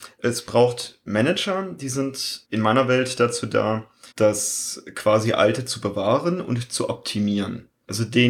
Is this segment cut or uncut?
cut